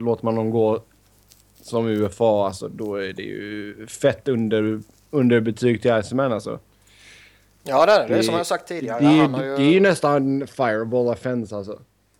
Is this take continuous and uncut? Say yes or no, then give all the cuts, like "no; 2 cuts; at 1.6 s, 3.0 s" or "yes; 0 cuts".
yes; 0 cuts